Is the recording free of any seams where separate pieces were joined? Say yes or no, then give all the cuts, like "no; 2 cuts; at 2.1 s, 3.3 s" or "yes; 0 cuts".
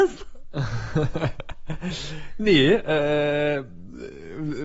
yes; 0 cuts